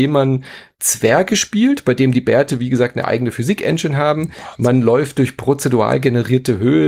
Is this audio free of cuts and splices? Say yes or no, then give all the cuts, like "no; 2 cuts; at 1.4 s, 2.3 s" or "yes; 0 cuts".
yes; 0 cuts